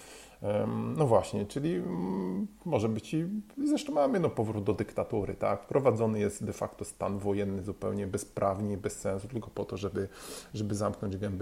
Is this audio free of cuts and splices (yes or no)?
yes